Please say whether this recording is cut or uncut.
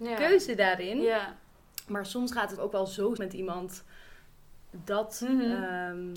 cut